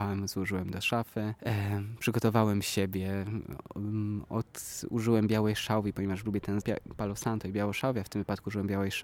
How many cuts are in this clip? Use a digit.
2